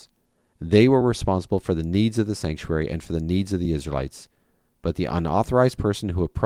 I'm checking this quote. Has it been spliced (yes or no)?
no